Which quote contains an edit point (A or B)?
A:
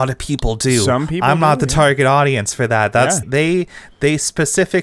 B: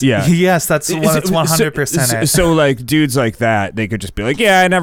A